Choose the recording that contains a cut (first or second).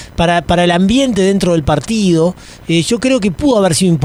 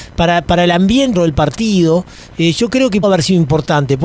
second